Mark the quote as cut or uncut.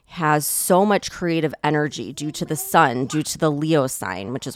uncut